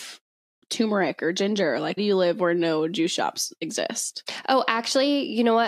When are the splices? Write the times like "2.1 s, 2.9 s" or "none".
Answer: 2.0 s